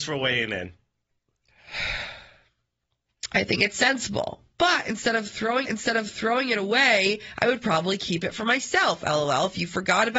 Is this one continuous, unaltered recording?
no; 1 cut; at 5.6 s

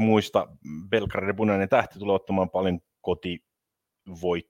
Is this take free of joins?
yes; 0 cuts

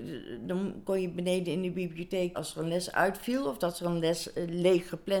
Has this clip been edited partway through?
yes; 1 cut; at 2.3 s

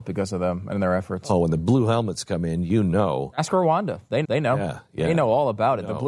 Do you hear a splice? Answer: yes; 1 cut; at 4.2 s

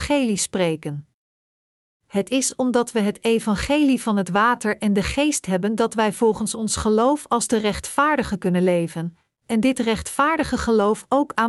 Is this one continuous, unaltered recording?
yes; 0 cuts

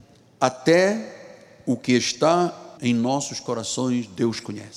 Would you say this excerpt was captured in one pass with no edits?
no; 1 cut; at 2.8 s

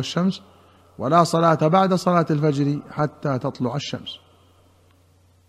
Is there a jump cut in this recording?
no; 0 cuts

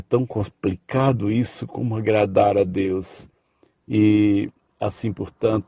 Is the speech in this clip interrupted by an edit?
no; 0 cuts

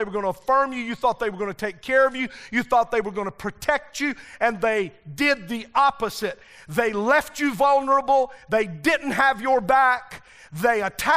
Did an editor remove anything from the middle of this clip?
no; 0 cuts

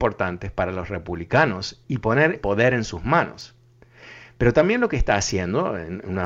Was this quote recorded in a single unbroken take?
no; 2 cuts; at 1.8 s, 2.4 s

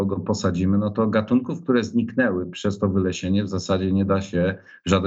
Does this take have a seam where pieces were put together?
no; 0 cuts

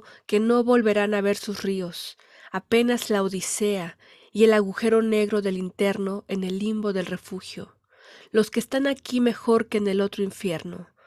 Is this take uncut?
yes; 0 cuts

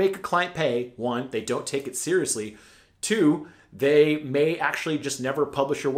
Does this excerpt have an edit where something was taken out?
no; 0 cuts

